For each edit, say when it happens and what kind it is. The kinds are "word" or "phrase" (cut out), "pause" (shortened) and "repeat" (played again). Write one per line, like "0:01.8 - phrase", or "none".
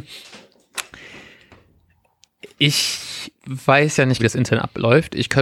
0:03.4 - pause
0:04.2 - word